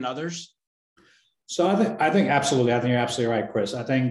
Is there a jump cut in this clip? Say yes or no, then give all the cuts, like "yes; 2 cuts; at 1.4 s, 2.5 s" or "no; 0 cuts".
no; 0 cuts